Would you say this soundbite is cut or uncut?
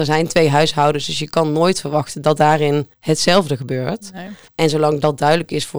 cut